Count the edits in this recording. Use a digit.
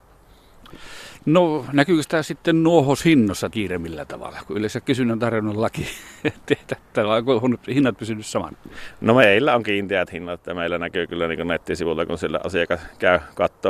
1